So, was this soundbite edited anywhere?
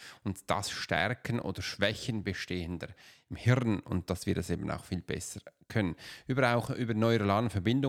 no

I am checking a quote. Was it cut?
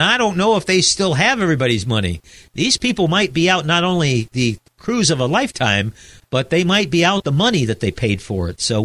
no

